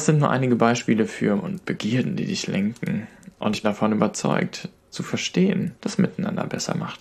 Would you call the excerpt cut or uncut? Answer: cut